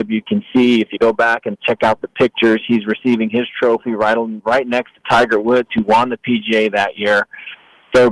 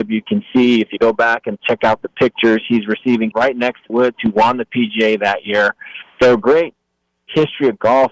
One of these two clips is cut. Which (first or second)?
second